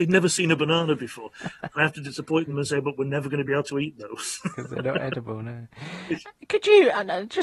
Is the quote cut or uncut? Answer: uncut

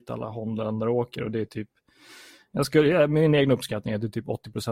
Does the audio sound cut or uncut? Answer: uncut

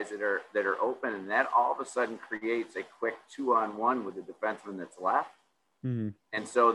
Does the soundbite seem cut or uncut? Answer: uncut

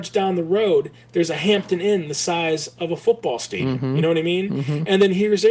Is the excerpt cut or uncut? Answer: uncut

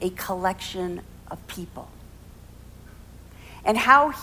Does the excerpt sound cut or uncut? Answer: uncut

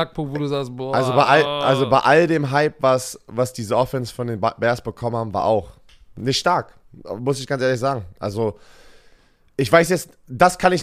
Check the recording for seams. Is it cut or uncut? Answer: uncut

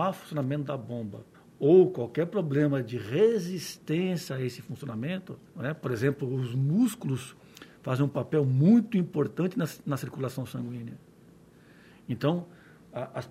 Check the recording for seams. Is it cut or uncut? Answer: cut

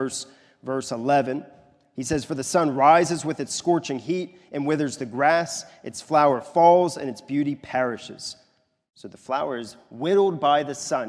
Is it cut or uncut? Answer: uncut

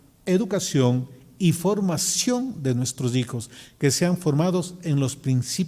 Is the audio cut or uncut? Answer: uncut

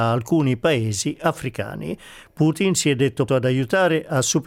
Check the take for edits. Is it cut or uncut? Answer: cut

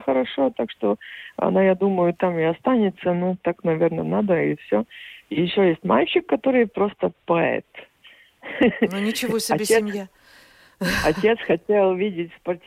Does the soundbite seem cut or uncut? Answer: uncut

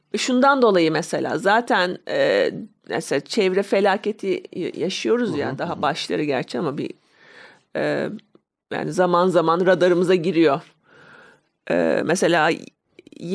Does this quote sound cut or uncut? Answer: uncut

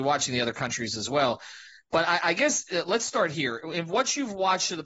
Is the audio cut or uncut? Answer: uncut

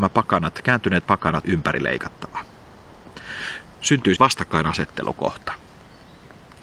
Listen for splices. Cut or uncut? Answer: cut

